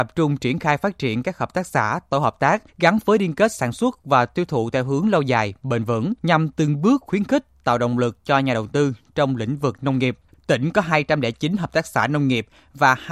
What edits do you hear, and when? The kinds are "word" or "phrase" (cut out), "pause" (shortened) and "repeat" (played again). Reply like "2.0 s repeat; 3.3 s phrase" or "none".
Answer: 2.7 s pause; 6.2 s pause; 10.3 s pause